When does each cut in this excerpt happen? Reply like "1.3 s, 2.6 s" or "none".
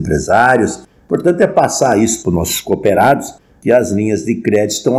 2.2 s